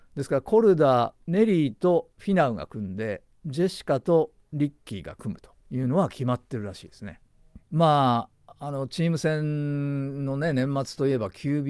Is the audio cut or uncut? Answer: cut